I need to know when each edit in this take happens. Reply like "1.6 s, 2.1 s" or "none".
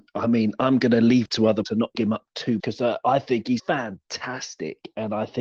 1.3 s, 1.6 s, 1.9 s, 2.6 s, 3.6 s